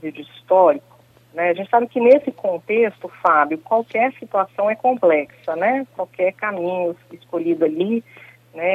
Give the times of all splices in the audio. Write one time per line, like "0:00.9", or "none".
none